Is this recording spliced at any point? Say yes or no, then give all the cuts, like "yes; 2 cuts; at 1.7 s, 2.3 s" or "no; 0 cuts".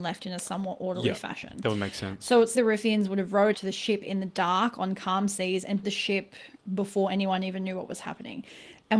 yes; 3 cuts; at 2.5 s, 3.5 s, 5.8 s